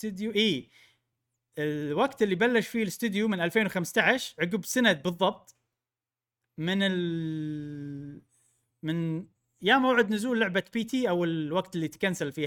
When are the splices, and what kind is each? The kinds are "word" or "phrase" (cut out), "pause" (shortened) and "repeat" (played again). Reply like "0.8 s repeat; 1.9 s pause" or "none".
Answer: none